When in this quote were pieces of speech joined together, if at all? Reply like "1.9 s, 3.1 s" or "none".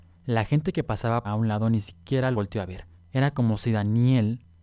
1.2 s, 2.3 s, 3.0 s